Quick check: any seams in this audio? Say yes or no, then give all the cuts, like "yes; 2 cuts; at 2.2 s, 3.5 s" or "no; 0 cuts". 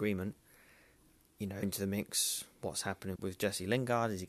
yes; 2 cuts; at 1.6 s, 3.2 s